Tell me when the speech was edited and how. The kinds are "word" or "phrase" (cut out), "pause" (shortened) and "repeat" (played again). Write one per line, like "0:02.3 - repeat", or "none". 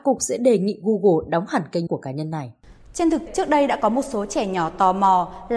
0:01.9 - word
0:03.3 - word